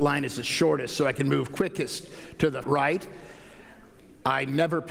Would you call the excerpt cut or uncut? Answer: cut